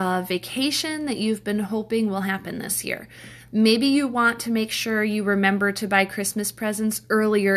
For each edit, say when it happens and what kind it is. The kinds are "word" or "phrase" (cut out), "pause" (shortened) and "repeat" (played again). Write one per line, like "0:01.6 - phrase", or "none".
none